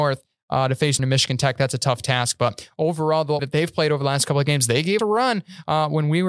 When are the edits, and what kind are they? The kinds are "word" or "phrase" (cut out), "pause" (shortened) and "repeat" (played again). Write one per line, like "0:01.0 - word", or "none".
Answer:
0:01.0 - word
0:03.4 - word
0:05.0 - word